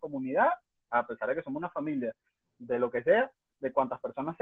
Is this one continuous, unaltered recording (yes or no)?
yes